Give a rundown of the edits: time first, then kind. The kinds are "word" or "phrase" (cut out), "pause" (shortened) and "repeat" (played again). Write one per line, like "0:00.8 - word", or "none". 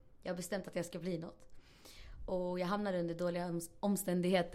none